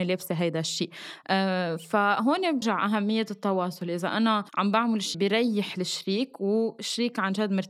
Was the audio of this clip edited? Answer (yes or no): yes